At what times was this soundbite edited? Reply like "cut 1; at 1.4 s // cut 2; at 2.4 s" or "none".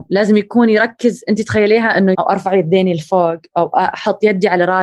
cut 1; at 2.1 s